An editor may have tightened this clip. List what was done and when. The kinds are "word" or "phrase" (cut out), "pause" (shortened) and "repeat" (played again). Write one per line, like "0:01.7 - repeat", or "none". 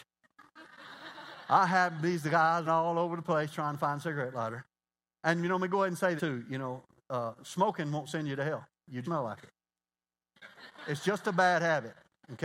0:02.7 - word
0:06.2 - word
0:09.0 - word